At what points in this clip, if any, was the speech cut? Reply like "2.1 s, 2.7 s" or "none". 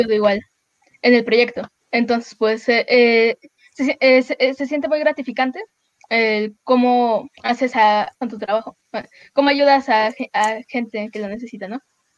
1.8 s, 7.3 s, 8.2 s